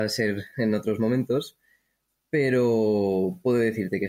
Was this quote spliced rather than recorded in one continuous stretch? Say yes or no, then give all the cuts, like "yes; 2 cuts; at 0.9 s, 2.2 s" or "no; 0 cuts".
no; 0 cuts